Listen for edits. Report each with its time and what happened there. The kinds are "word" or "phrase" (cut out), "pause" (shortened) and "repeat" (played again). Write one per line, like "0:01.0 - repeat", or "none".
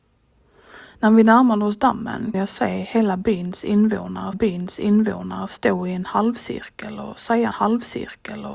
0:02.3 - word
0:04.3 - repeat
0:07.5 - repeat